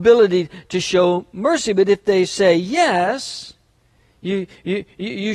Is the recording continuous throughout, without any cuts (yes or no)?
yes